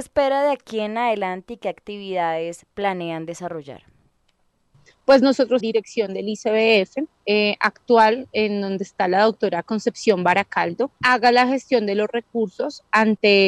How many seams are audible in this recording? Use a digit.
3